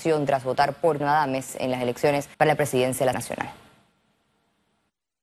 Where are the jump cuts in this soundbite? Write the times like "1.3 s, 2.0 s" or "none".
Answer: 1.0 s, 2.3 s, 3.1 s